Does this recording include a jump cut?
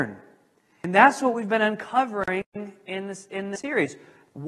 no; 0 cuts

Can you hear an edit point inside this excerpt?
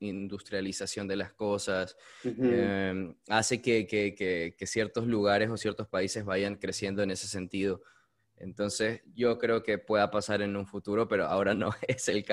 no; 0 cuts

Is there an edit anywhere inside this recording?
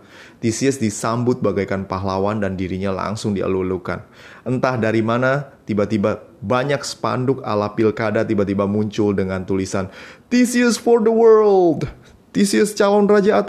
no; 0 cuts

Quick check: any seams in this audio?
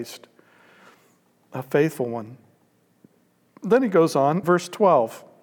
yes; 1 cut; at 4.4 s

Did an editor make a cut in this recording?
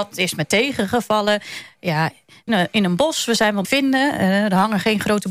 yes; 2 cuts; at 2.5 s, 3.6 s

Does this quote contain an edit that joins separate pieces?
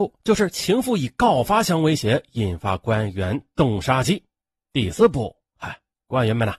no; 0 cuts

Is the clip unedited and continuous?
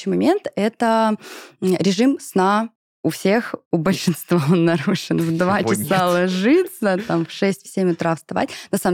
yes; 0 cuts

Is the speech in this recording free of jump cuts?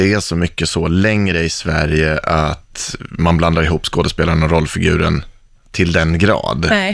yes; 0 cuts

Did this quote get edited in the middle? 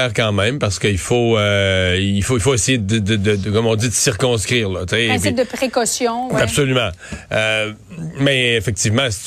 no; 0 cuts

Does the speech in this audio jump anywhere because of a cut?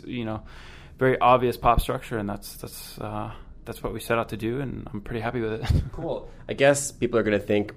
no; 0 cuts

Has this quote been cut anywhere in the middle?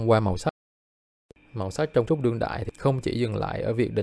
yes; 1 cut; at 2.1 s

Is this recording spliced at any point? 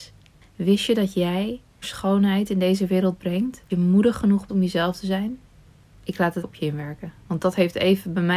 yes; 4 cuts; at 1.8 s, 3.7 s, 4.5 s, 6.4 s

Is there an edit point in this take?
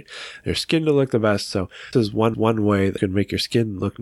yes; 3 cuts; at 1.9 s, 2.3 s, 3.0 s

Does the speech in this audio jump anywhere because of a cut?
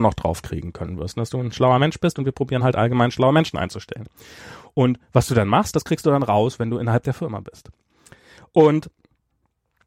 no; 0 cuts

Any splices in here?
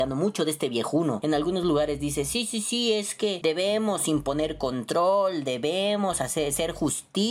no; 0 cuts

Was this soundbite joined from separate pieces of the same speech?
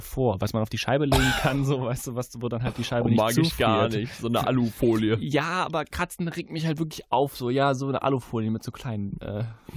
no; 0 cuts

